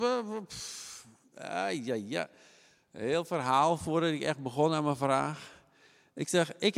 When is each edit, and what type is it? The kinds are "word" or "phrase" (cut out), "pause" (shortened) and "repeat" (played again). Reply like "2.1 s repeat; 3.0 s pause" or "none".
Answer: none